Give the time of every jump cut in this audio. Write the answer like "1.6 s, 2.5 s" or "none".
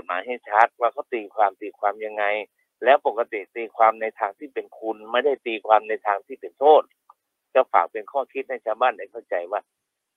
none